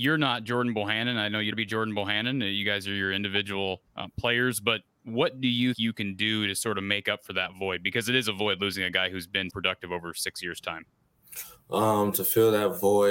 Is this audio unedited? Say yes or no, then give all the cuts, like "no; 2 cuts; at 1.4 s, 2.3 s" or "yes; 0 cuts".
no; 5 cuts; at 1.5 s, 3.9 s, 4.9 s, 5.7 s, 9.5 s